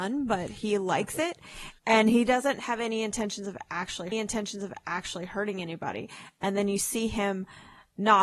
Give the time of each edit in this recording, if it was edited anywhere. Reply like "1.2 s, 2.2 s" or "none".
1.8 s, 4.1 s

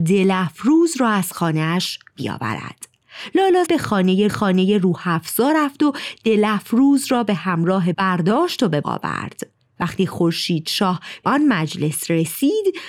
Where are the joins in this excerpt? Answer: 3.6 s, 4.3 s, 7.9 s, 8.8 s, 11.2 s

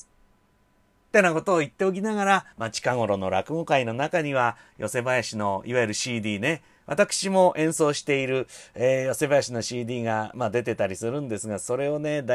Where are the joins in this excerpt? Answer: 2.5 s

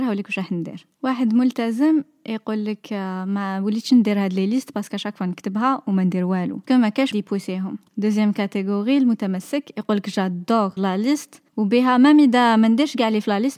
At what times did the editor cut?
0.9 s, 6.7 s, 7.1 s, 10.8 s, 11.5 s

